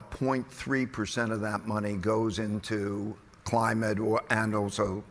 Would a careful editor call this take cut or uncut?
uncut